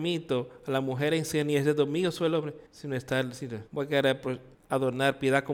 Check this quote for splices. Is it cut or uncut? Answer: cut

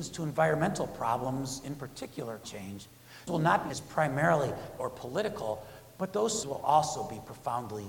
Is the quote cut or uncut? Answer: cut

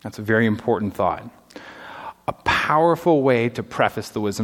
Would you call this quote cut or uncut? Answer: uncut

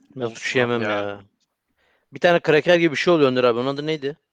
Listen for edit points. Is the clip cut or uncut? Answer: uncut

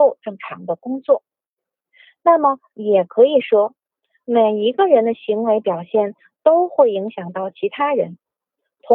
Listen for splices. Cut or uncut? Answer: uncut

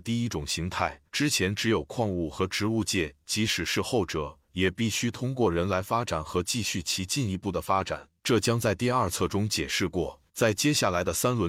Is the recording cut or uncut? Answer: cut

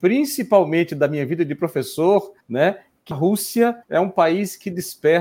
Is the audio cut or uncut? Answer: cut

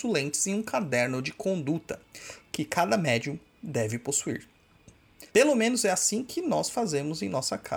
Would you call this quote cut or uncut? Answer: cut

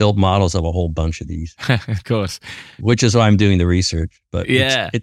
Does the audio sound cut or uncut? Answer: uncut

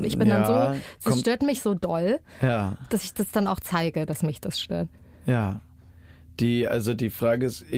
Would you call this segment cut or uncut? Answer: uncut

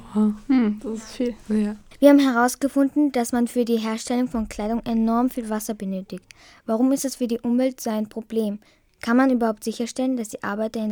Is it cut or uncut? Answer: uncut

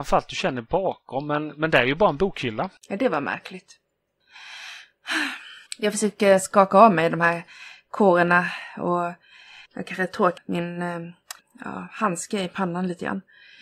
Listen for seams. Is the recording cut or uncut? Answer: cut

